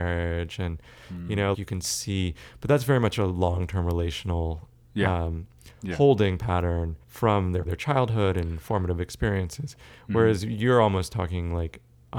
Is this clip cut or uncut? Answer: cut